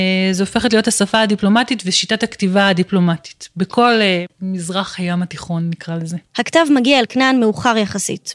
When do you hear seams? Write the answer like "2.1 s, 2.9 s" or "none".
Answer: none